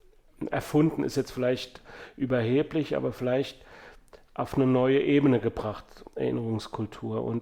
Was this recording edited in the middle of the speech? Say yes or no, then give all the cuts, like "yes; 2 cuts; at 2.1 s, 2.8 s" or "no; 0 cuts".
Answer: no; 0 cuts